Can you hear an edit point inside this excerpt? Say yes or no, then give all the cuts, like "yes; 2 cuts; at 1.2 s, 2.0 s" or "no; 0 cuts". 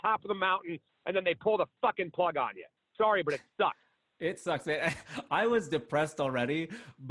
no; 0 cuts